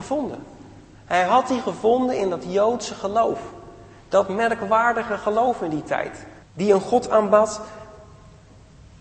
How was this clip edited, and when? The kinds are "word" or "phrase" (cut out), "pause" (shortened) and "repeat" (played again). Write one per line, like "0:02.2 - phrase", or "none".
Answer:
0:06.4 - pause